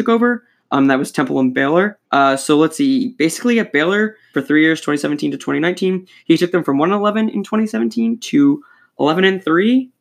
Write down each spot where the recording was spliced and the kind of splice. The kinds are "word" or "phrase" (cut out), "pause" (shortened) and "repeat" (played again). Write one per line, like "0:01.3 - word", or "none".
0:02.0 - pause
0:04.3 - phrase